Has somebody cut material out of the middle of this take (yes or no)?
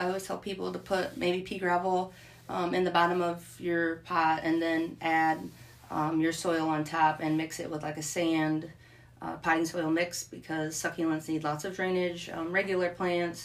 no